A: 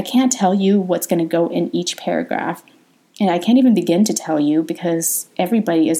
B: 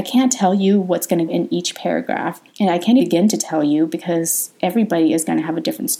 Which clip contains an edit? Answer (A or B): B